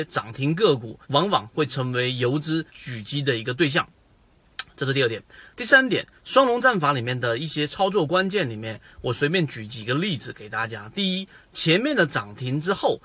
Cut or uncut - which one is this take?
cut